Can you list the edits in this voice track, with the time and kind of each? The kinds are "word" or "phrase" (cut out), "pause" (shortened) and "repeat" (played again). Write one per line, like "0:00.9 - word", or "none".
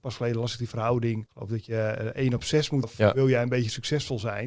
0:01.3 - word
0:02.8 - word